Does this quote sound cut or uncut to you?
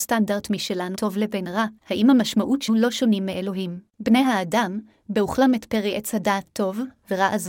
cut